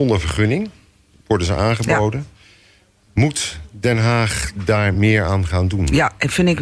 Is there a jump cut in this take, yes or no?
no